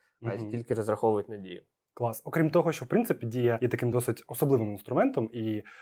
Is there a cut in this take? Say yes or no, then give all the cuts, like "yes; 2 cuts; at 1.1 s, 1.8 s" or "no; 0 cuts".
no; 0 cuts